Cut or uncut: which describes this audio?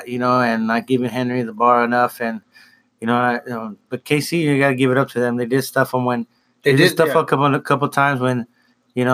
uncut